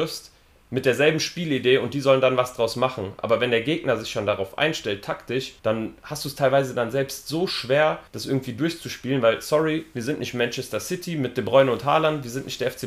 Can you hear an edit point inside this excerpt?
yes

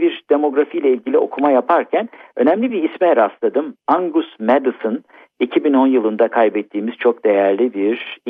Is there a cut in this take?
no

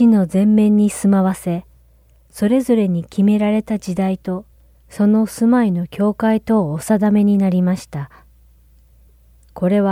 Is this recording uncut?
yes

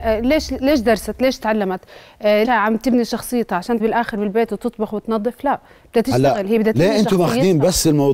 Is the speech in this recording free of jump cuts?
no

